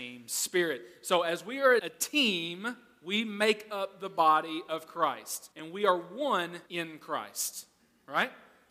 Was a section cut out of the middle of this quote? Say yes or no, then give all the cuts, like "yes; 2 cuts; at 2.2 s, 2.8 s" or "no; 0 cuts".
yes; 3 cuts; at 1.8 s, 5.5 s, 6.7 s